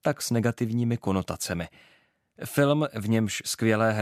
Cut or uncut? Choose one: uncut